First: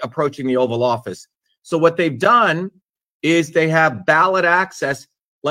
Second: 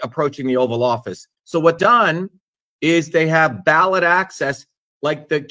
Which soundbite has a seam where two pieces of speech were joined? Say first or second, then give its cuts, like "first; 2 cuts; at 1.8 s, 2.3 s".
second; 2 cuts; at 1.4 s, 1.8 s